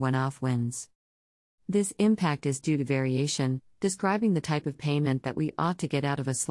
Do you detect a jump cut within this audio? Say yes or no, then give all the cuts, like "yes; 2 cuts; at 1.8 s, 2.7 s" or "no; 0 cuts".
no; 0 cuts